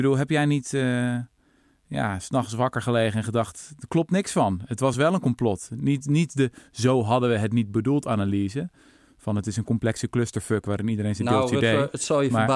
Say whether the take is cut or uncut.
uncut